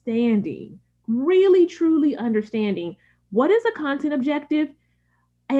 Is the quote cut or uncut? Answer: uncut